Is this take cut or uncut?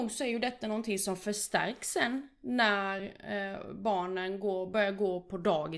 uncut